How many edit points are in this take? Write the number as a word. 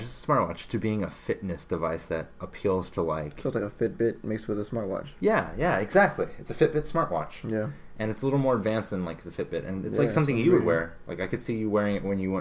zero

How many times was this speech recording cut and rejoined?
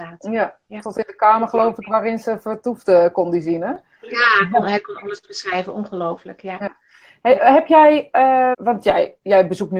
one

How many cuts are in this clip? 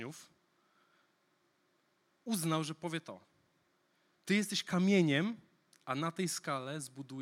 zero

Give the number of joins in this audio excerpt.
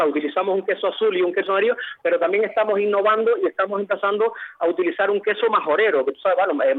zero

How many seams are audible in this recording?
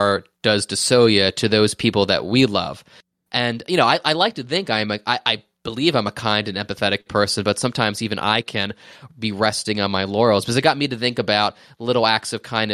zero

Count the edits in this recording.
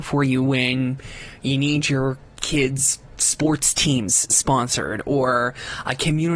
zero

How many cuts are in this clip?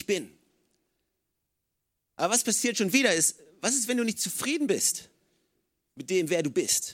zero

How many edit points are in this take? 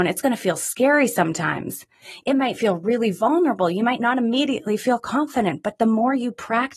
zero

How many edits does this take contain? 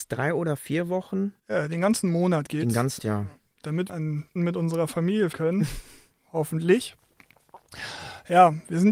five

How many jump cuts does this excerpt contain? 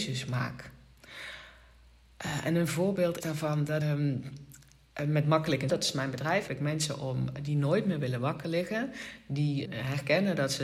five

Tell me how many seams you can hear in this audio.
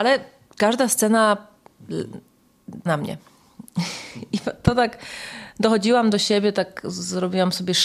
one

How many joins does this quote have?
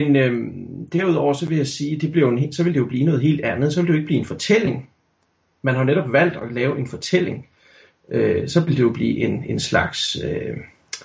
zero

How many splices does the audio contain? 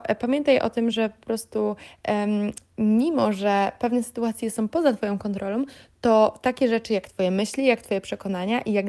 zero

